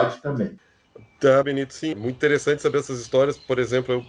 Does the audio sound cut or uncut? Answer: cut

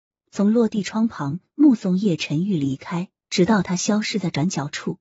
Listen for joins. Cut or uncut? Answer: cut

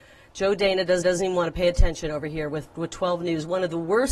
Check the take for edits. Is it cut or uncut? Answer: cut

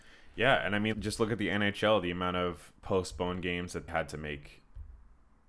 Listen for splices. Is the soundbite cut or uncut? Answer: cut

